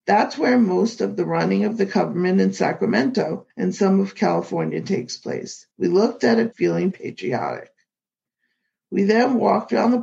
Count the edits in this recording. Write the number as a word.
four